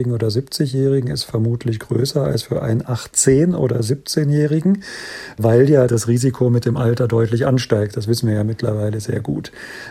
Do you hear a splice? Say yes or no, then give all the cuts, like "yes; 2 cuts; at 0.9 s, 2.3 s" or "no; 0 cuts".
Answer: no; 0 cuts